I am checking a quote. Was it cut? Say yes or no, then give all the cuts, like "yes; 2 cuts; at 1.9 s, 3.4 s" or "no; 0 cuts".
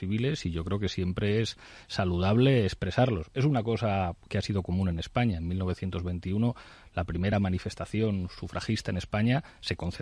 no; 0 cuts